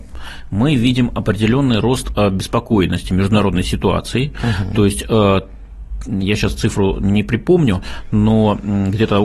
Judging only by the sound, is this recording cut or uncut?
uncut